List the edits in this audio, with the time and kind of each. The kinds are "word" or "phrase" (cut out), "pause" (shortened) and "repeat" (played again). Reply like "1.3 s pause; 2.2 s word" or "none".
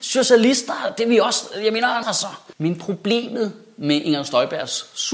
2.0 s word